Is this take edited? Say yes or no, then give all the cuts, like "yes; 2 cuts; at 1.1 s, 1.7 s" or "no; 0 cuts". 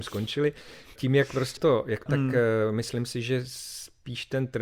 yes; 3 cuts; at 1.0 s, 1.6 s, 2.1 s